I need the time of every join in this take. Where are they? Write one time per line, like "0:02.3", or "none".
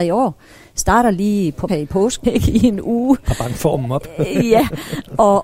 0:01.7
0:02.2